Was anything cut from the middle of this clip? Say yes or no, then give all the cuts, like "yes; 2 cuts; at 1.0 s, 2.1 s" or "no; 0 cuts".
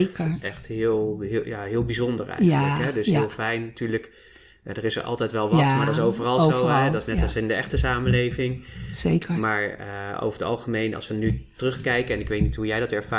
no; 0 cuts